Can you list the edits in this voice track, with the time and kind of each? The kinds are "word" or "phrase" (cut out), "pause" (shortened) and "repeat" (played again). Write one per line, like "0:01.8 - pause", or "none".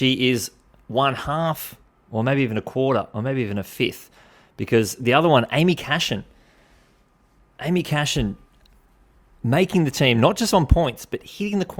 none

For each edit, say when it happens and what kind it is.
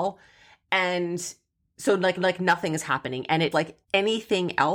0:02.2 - repeat
0:03.5 - word
0:03.8 - pause

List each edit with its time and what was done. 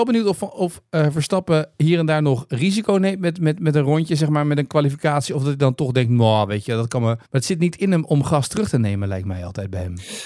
0:07.2 - pause

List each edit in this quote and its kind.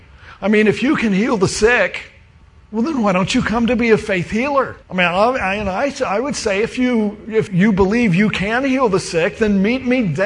0:02.4 - pause
0:04.8 - pause
0:07.5 - word

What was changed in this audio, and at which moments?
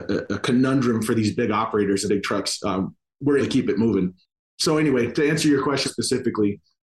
0:02.1 - word
0:03.4 - word
0:05.8 - word

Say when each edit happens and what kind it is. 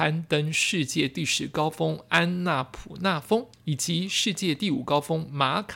0:03.5 - pause

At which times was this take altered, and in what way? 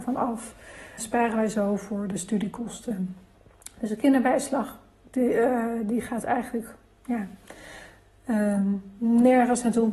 0:01.0 - phrase

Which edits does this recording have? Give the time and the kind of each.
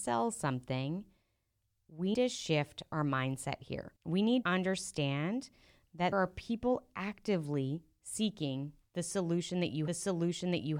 0:02.1 - word
0:04.0 - pause
0:04.4 - word
0:06.1 - word
0:09.9 - repeat

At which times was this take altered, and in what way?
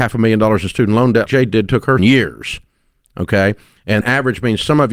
0:01.3 - word
0:02.0 - word
0:04.0 - word

